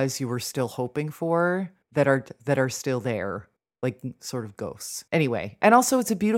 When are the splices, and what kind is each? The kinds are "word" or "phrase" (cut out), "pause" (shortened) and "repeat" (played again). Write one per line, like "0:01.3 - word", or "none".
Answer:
0:01.8 - pause
0:03.6 - pause
0:05.1 - pause